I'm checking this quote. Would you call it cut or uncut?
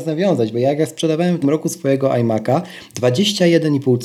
cut